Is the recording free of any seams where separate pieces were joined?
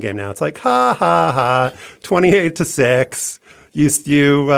yes; 0 cuts

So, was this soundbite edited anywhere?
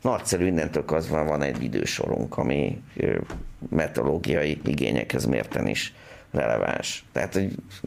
no; 0 cuts

